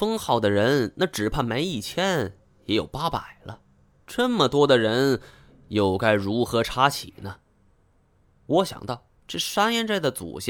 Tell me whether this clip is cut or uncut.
uncut